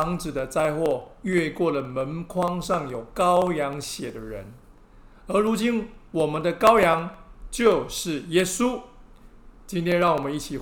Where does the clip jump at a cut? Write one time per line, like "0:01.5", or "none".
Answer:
0:09.6